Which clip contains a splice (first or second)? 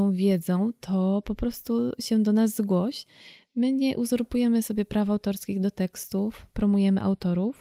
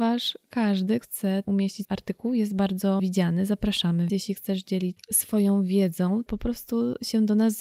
second